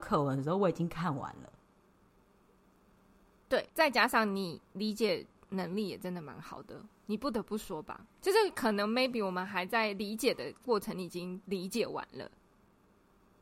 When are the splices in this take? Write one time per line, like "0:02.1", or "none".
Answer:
0:03.7
0:08.1

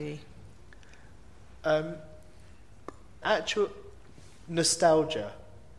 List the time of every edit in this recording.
0:03.2

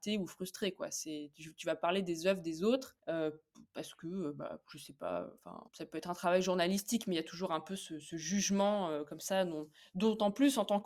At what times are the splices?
0:03.0
0:05.7

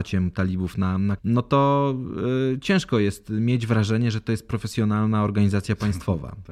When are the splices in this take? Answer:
0:01.2

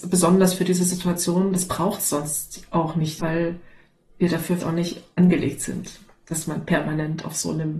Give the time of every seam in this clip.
0:03.2
0:04.6

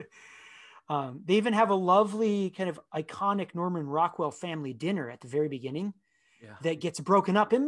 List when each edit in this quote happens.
none

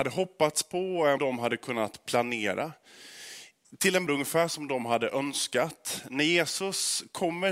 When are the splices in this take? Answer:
0:01.2
0:04.1

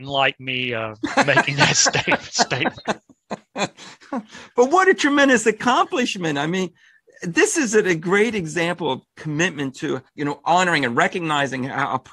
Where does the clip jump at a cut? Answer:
0:10.1

